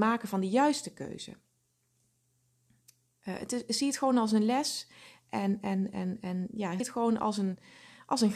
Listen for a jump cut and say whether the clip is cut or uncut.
cut